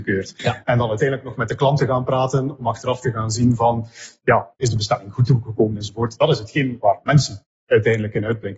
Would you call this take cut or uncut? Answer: uncut